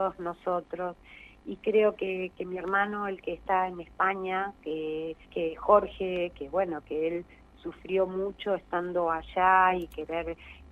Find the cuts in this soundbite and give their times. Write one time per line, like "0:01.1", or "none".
0:05.2